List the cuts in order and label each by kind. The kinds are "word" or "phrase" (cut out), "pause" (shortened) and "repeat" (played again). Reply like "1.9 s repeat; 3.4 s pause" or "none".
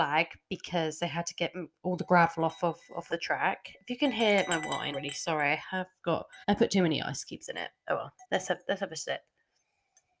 3.1 s word; 4.9 s word; 6.4 s pause; 7.9 s word; 8.2 s pause